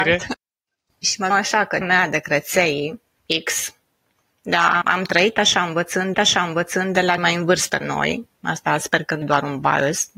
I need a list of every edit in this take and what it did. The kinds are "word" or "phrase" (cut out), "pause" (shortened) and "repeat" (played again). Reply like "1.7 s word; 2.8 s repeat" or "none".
1.3 s word; 1.8 s word; 4.8 s word; 6.1 s repeat; 7.2 s word; 7.8 s word; 8.3 s pause; 9.2 s word